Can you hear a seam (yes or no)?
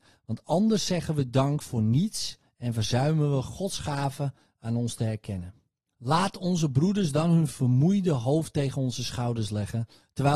no